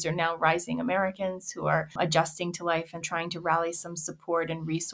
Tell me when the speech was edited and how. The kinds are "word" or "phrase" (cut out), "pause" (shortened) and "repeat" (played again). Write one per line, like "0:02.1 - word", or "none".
0:01.9 - pause
0:03.0 - word